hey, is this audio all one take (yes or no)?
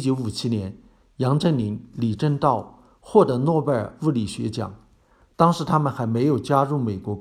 yes